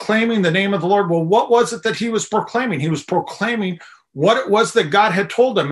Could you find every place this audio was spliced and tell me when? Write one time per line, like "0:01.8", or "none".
none